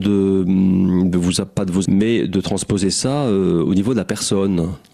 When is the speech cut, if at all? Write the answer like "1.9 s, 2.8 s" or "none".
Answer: 1.8 s